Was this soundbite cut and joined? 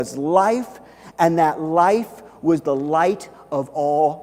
no; 0 cuts

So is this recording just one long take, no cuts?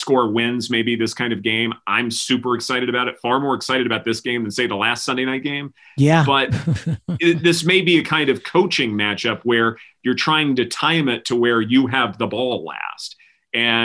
yes; 0 cuts

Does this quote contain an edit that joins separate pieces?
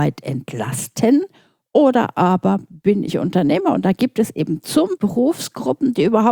yes; 1 cut; at 5.0 s

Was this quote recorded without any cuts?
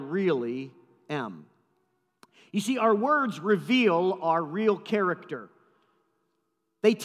yes; 0 cuts

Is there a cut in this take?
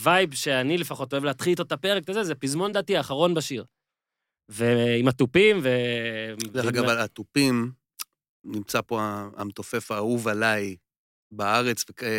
no; 0 cuts

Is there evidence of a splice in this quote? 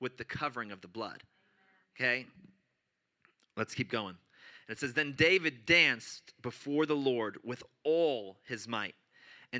no; 0 cuts

